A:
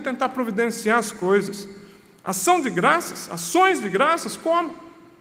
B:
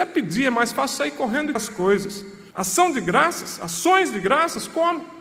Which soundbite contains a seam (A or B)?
B